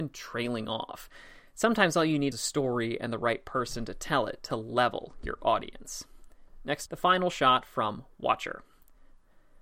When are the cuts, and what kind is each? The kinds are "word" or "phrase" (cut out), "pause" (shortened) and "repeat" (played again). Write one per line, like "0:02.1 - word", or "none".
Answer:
0:02.3 - word
0:06.9 - word

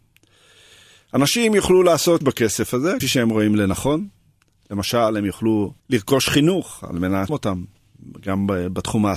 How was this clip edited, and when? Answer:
0:02.2 - word
0:03.0 - word
0:05.8 - pause
0:07.3 - word

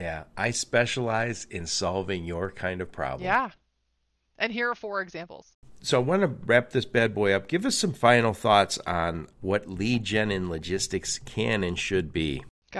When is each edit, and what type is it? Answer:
none

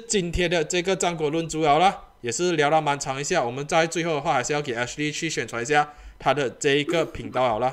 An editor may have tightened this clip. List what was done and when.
none

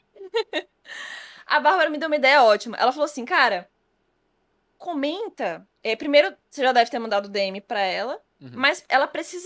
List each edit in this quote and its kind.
0:05.8 - pause
0:06.4 - pause

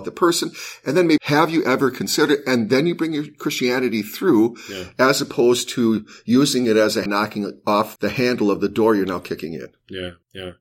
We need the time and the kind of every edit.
0:01.2 - phrase
0:07.1 - word
0:08.0 - word

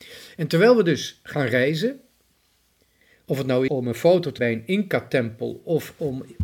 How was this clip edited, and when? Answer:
0:03.7 - word
0:04.4 - word

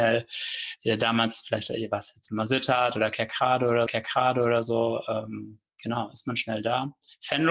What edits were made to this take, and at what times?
0:02.3 - word
0:03.9 - repeat

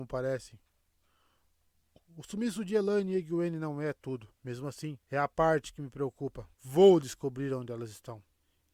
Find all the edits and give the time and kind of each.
0:04.4 - pause
0:05.0 - pause
0:06.5 - pause

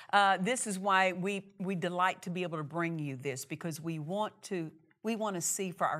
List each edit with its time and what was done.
none

